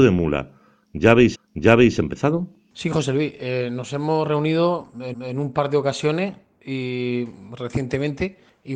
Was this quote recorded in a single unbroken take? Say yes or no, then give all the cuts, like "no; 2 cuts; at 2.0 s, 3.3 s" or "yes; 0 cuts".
no; 2 cuts; at 1.3 s, 5.1 s